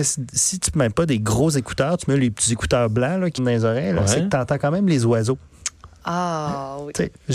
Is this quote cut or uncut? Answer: cut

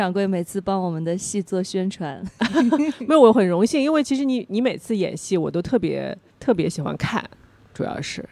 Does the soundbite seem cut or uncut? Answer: cut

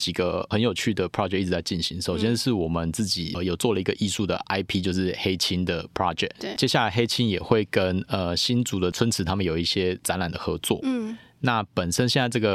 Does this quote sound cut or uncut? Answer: uncut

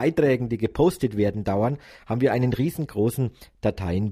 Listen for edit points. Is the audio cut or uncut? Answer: uncut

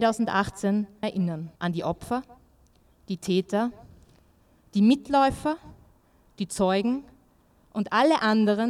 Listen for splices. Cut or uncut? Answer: cut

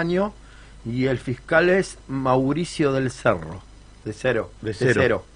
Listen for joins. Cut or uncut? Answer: uncut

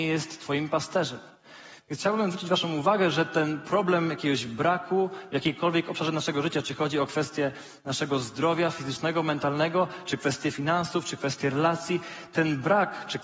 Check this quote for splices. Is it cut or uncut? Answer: uncut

